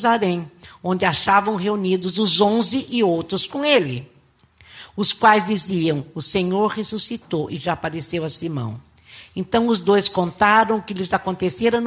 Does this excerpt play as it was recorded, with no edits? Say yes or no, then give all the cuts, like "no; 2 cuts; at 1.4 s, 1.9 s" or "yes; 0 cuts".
yes; 0 cuts